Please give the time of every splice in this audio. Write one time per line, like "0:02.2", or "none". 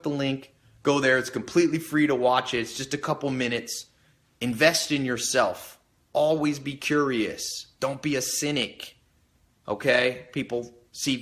none